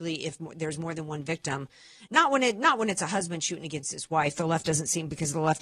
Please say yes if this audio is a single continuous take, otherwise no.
yes